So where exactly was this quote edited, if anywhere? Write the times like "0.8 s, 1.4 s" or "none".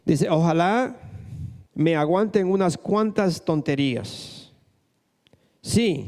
1.7 s